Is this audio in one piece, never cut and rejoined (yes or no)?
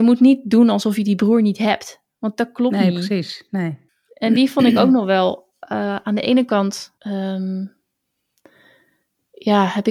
no